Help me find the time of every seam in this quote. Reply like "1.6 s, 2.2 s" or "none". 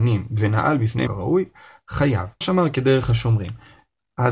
1.1 s, 2.4 s